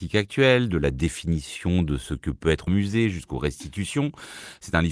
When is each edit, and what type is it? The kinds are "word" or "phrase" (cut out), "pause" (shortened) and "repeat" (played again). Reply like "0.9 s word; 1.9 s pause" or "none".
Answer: 2.7 s phrase